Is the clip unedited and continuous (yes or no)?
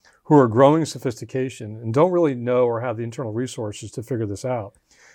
yes